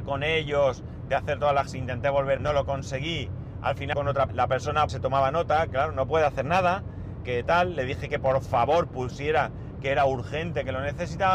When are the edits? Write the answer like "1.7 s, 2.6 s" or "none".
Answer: 1.7 s, 2.4 s, 3.9 s, 4.3 s, 4.9 s, 5.7 s, 7.2 s